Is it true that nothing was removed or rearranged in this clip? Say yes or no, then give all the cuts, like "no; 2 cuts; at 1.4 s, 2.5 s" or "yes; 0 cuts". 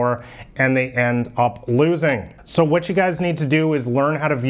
yes; 0 cuts